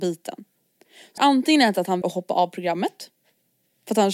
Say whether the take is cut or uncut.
cut